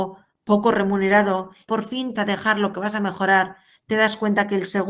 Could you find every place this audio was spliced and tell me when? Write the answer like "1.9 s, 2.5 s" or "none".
1.7 s, 2.2 s, 2.7 s